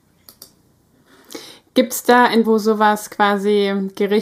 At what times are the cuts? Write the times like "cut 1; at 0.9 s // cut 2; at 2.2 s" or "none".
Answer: cut 1; at 2.4 s